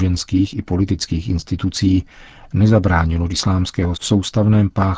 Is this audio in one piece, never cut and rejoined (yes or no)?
no